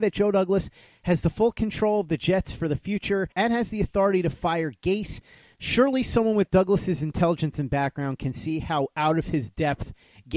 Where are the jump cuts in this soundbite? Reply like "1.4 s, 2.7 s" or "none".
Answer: 3.3 s